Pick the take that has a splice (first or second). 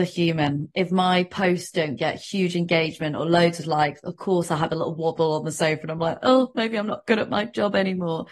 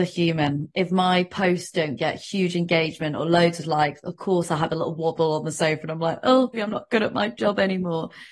second